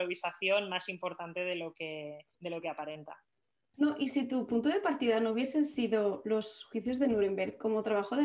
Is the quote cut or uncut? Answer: cut